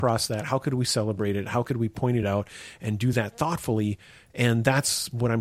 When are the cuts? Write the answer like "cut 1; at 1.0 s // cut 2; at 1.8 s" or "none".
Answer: none